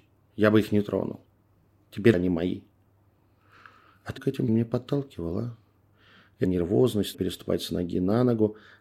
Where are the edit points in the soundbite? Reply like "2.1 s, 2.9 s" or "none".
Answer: 2.1 s, 4.2 s, 4.5 s, 6.4 s, 7.1 s